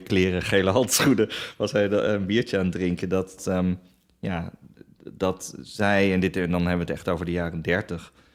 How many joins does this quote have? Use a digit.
1